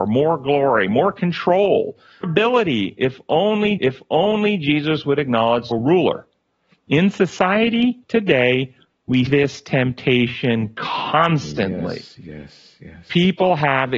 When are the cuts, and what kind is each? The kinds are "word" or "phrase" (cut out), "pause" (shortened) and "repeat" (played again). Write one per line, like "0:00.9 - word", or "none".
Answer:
0:02.2 - word
0:03.8 - repeat
0:05.7 - phrase
0:08.0 - pause
0:09.3 - word